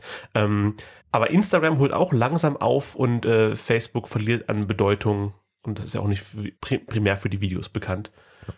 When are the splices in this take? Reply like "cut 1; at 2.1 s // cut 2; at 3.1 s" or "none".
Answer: cut 1; at 1.0 s // cut 2; at 6.6 s

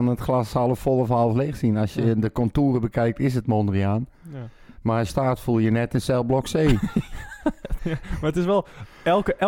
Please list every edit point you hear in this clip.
cut 1; at 5.1 s // cut 2; at 7.8 s

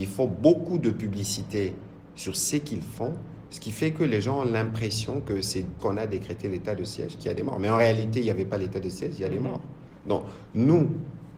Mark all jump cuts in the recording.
cut 1; at 5.8 s

